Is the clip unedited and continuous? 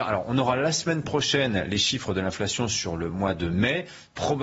yes; 0 cuts

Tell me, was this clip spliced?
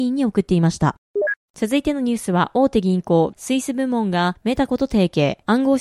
yes; 1 cut; at 3.3 s

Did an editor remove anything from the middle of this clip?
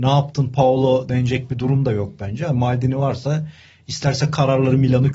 no; 0 cuts

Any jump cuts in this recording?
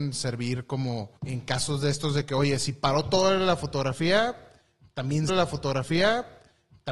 yes; 2 cuts; at 1.2 s, 5.3 s

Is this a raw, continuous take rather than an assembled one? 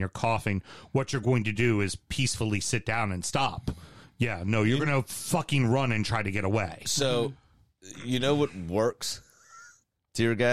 yes; 0 cuts

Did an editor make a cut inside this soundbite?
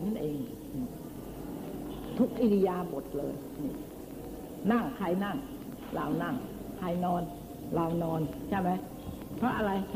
yes; 1 cut; at 6.8 s

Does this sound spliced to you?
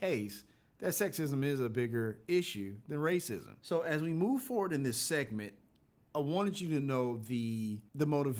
no; 0 cuts

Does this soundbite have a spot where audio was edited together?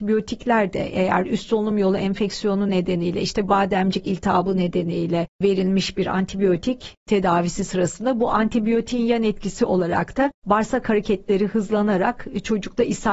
no; 0 cuts

